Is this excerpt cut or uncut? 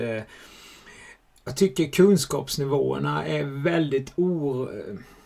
uncut